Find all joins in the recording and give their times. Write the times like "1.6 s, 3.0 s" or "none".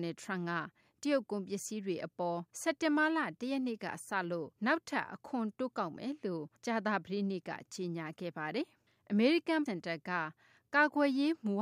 2.5 s, 4.6 s, 6.6 s, 9.7 s